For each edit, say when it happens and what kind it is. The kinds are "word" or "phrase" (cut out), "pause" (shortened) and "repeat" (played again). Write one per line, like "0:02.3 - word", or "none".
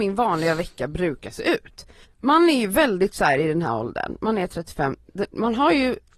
0:02.0 - pause